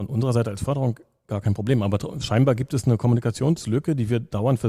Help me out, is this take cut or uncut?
uncut